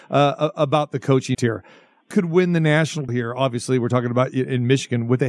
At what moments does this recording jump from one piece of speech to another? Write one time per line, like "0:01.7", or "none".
0:01.3
0:02.1
0:03.1